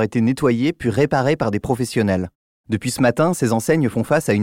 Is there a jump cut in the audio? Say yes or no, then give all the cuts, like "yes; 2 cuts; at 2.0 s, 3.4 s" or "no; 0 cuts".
no; 0 cuts